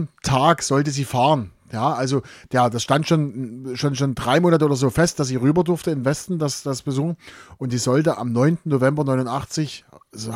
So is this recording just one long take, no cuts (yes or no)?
yes